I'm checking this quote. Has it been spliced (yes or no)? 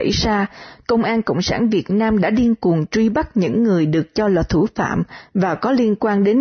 no